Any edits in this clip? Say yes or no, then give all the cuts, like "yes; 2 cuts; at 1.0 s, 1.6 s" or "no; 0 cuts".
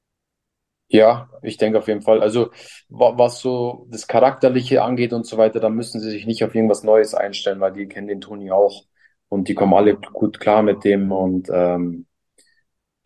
no; 0 cuts